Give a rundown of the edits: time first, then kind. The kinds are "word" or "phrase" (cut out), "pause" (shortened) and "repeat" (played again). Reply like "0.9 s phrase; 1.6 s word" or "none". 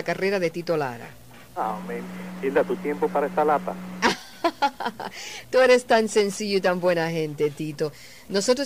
1.5 s pause; 2.8 s word